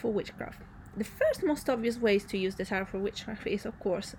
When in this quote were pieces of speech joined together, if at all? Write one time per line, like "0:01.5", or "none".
none